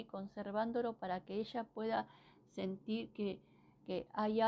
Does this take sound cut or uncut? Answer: uncut